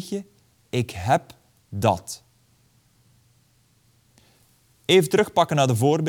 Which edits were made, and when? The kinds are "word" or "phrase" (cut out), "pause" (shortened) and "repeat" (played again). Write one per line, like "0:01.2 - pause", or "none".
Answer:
0:01.6 - phrase

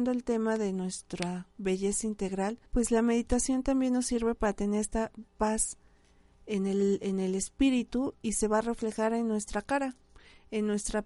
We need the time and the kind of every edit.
0:02.7 - pause
0:05.3 - pause

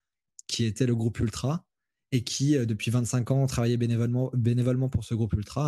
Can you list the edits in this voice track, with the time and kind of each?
none

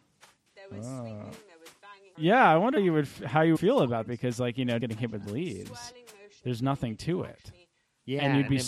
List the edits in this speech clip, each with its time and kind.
0:02.1 - word
0:02.8 - word
0:03.5 - word
0:04.1 - word
0:04.8 - word

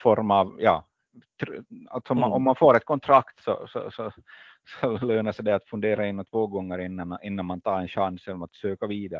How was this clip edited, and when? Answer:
none

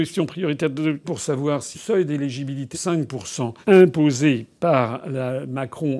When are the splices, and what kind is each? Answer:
0:01.0 - word
0:01.7 - word
0:02.7 - word
0:03.6 - pause

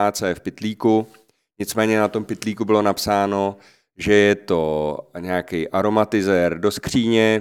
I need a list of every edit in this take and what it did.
none

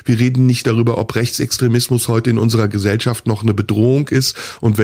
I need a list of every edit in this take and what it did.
none

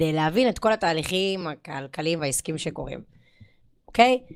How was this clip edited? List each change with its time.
none

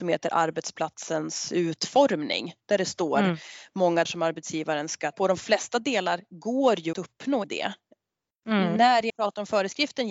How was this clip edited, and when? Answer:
0:04.0 - word
0:05.1 - word
0:06.9 - word
0:07.4 - word
0:09.1 - word

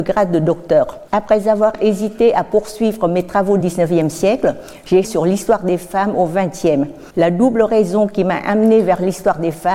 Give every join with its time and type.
0:01.1 - pause
0:03.6 - phrase
0:05.0 - phrase
0:07.1 - pause

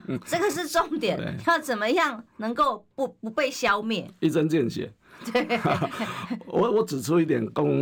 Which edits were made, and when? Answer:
none

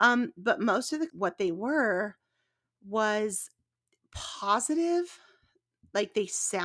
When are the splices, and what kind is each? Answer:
0:01.1 - word

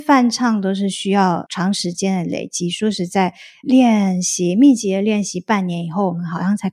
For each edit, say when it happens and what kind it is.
0:03.6 - word

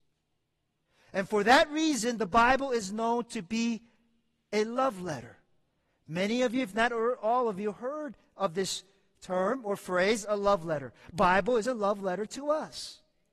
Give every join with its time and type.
none

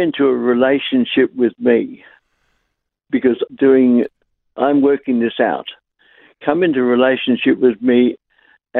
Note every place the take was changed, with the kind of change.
0:03.5 - word

